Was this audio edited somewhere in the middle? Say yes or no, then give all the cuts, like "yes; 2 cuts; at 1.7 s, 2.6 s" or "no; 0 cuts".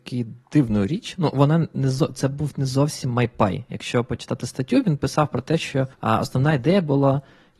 yes; 1 cut; at 5.9 s